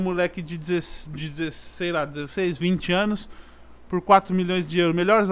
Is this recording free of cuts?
yes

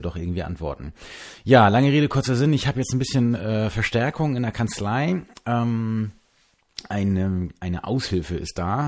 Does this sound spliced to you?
no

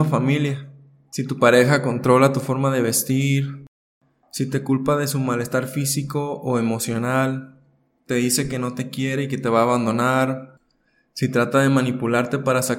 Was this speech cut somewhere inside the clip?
no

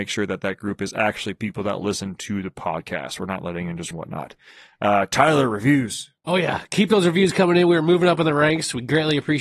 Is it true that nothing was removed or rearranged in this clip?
no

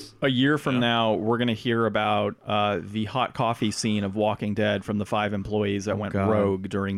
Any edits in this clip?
no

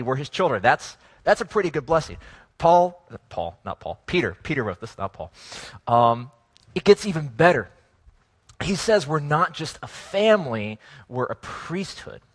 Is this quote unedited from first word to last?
yes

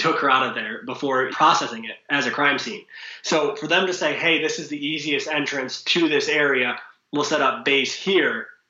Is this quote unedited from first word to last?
no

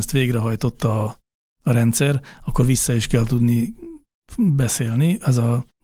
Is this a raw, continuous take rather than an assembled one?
yes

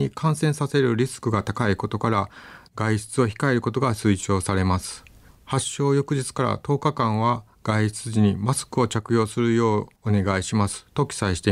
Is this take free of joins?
no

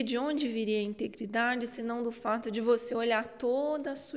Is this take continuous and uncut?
yes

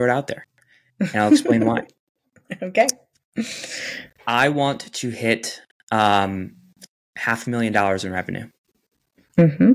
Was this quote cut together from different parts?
no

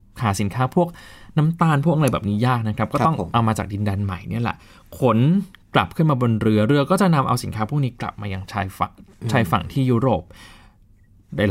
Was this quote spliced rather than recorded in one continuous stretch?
no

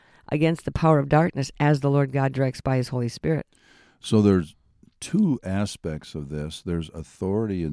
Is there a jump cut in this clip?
no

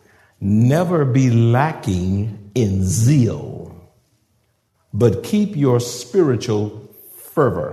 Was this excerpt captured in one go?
yes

